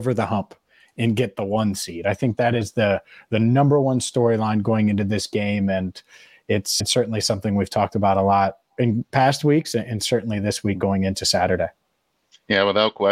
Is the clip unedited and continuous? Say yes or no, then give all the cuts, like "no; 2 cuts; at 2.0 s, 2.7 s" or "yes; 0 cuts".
no; 1 cut; at 6.8 s